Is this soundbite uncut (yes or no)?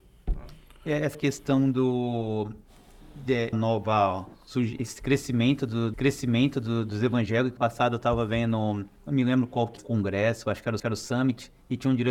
no